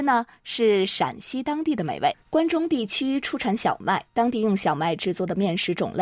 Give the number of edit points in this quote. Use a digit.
2